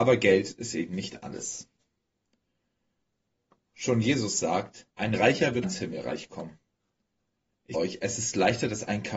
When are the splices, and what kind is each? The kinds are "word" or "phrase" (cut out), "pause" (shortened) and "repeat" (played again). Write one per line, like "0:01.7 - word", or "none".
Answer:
0:04.9 - pause
0:05.6 - word
0:07.7 - word